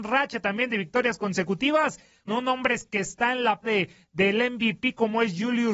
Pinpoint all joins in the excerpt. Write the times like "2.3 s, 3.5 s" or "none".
2.3 s, 3.6 s